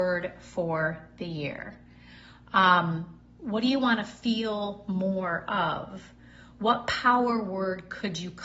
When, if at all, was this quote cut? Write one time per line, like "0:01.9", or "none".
none

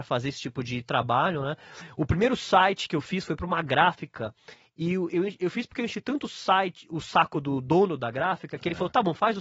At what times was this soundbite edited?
none

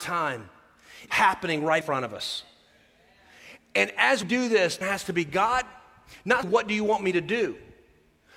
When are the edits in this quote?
0:01.1
0:01.8
0:04.2
0:04.8
0:06.4

